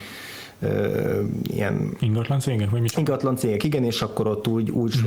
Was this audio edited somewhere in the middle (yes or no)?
no